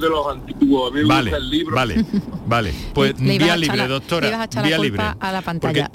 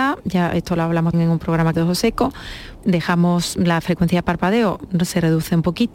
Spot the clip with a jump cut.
second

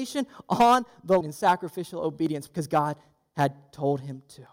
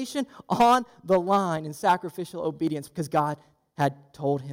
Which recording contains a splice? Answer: first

